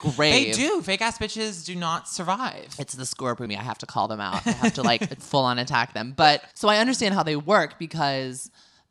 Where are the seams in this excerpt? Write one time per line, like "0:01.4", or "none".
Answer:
0:03.5
0:05.2
0:06.5